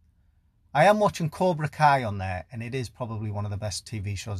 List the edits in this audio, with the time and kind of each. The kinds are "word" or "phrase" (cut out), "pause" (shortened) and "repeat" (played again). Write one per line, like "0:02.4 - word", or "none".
none